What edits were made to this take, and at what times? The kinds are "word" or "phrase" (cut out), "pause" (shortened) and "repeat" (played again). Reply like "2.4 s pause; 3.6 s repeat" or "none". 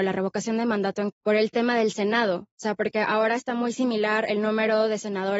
1.1 s word